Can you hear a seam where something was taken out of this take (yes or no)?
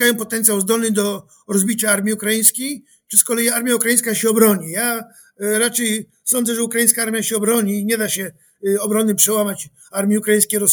no